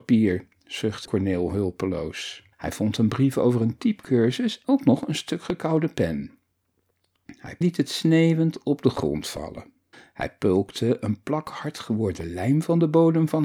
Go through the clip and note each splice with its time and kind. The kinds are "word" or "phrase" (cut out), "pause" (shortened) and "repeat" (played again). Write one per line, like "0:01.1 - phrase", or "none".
0:01.0 - word
0:02.5 - pause
0:04.6 - word
0:07.6 - phrase
0:09.9 - pause